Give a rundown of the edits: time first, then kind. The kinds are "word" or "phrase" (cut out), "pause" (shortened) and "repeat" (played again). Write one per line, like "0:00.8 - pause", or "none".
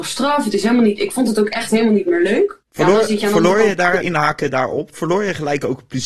0:02.6 - pause
0:04.0 - word